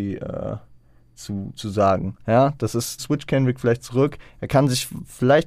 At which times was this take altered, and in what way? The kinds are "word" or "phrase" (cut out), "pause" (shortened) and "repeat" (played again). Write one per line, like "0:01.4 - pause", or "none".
0:03.0 - word